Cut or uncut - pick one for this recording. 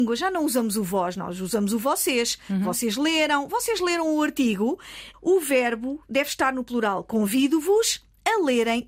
cut